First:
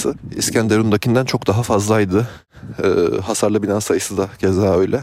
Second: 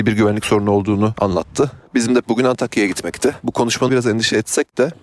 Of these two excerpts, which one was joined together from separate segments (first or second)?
second